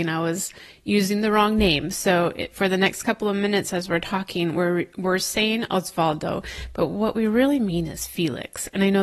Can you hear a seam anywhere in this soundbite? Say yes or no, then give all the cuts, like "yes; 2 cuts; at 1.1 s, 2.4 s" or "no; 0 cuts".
no; 0 cuts